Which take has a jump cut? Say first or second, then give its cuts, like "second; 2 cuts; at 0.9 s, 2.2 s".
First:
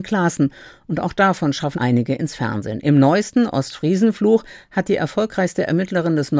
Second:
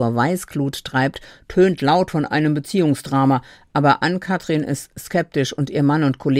first; 1 cut; at 1.7 s